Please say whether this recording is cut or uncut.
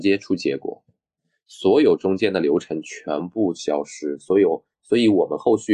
uncut